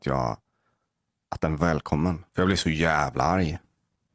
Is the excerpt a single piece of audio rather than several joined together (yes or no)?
no